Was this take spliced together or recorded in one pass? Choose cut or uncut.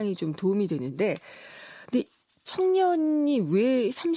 uncut